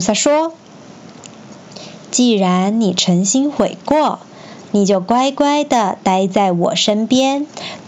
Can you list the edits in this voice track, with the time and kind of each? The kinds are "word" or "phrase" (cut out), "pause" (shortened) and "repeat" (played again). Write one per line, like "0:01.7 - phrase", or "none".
0:04.7 - phrase